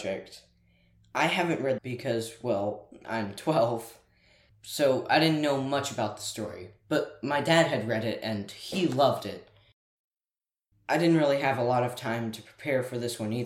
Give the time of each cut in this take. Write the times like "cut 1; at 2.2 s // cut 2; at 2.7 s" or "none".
cut 1; at 1.8 s